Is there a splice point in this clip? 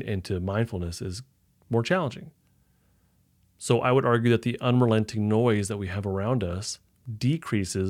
no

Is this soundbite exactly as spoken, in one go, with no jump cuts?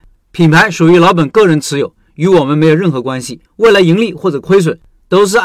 no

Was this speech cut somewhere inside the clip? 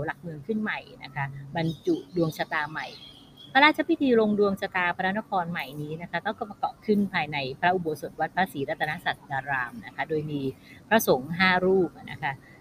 no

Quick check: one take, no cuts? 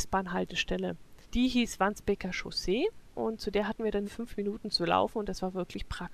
no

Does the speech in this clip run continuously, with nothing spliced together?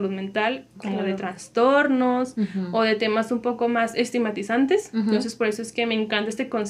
yes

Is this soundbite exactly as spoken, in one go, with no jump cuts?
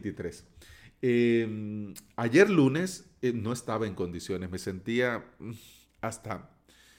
yes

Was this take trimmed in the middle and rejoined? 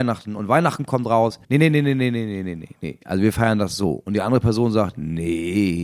yes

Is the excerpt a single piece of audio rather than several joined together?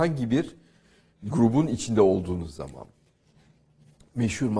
yes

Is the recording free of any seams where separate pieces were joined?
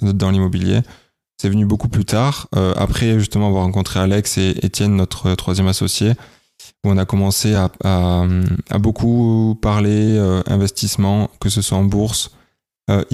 yes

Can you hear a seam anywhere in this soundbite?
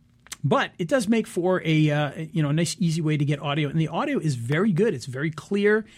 no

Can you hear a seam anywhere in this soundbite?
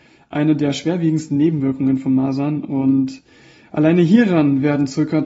no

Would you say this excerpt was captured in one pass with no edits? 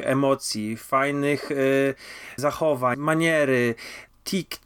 no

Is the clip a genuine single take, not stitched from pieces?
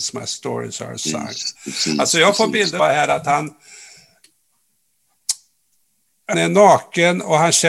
no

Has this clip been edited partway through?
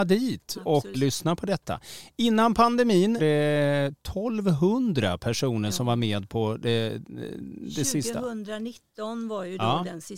yes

